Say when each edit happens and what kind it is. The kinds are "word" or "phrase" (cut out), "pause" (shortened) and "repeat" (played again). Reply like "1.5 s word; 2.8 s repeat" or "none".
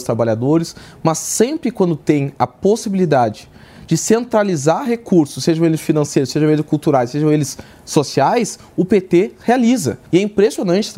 10.1 s pause